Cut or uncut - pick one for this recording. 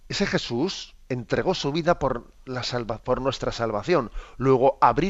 cut